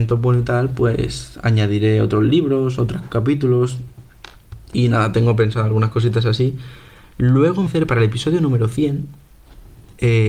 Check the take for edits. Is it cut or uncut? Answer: cut